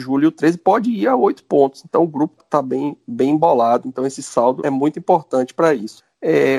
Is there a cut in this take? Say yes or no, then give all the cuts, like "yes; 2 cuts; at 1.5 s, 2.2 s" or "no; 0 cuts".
yes; 2 cuts; at 2.4 s, 4.6 s